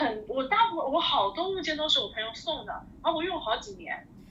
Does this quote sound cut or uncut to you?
uncut